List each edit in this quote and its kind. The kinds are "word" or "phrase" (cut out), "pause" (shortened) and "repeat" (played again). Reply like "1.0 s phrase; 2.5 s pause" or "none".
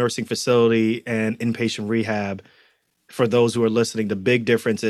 none